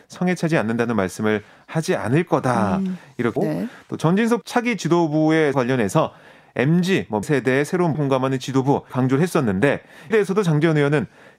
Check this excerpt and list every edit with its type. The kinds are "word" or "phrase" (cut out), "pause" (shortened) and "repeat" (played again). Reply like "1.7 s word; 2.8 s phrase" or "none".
3.4 s phrase; 4.4 s word; 5.5 s word; 7.2 s word; 7.9 s word; 8.9 s word; 10.1 s word